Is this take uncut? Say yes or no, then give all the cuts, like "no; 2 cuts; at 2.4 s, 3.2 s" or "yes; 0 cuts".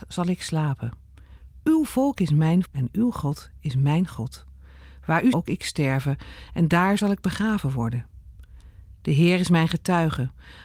no; 2 cuts; at 2.7 s, 5.3 s